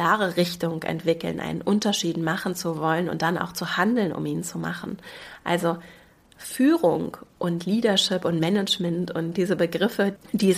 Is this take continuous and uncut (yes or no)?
yes